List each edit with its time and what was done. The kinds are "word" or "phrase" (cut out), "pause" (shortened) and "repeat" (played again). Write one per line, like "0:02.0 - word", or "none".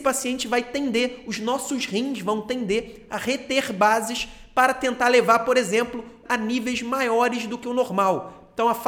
0:06.3 - word